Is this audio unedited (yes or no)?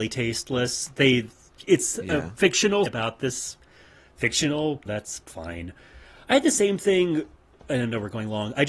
no